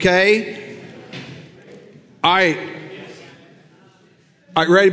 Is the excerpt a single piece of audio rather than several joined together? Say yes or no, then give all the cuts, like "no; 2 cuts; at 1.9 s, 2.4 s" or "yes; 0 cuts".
yes; 0 cuts